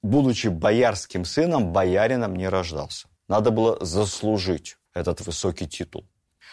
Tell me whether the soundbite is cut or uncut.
cut